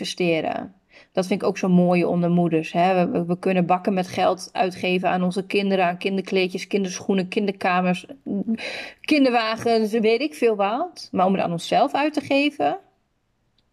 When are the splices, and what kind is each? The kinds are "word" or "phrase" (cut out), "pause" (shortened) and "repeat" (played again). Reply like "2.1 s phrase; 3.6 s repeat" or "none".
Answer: none